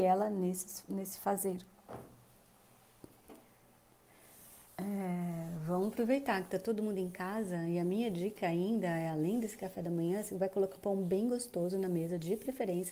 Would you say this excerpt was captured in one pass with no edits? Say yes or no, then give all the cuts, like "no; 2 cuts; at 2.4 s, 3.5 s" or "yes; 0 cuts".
no; 2 cuts; at 4.7 s, 10.8 s